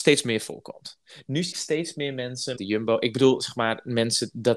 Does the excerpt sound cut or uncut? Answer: cut